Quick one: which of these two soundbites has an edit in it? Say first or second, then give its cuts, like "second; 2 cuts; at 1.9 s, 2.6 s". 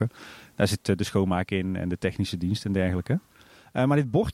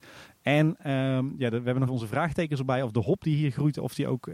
second; 1 cut; at 1.9 s